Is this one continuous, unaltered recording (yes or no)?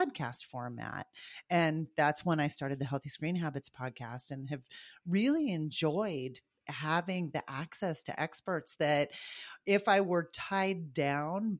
yes